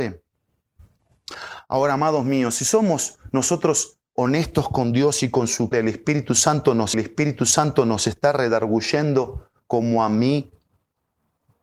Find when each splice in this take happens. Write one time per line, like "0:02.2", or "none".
0:04.1
0:05.7
0:06.9